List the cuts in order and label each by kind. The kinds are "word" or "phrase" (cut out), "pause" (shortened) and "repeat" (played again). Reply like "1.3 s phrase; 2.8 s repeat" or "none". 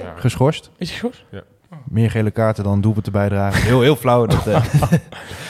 none